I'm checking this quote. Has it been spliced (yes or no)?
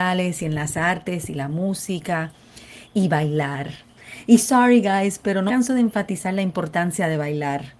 yes